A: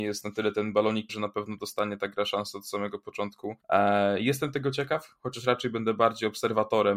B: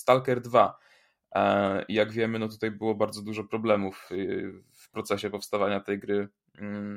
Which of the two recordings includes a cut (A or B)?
A